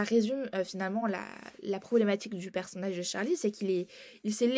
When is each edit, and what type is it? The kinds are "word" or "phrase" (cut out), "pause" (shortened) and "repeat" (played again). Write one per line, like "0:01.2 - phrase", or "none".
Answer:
none